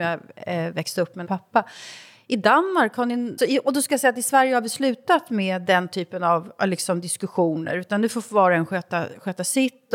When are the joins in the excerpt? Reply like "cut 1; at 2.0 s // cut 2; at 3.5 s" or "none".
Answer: cut 1; at 1.2 s // cut 2; at 3.4 s